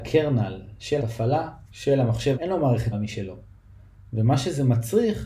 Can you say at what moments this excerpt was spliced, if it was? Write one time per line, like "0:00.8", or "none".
0:01.0
0:01.6
0:02.3
0:02.9